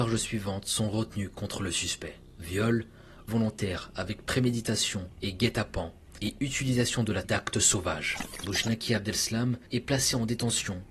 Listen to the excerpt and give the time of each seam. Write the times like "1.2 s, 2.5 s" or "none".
3.3 s, 7.2 s, 9.7 s